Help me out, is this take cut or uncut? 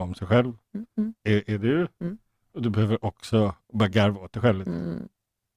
uncut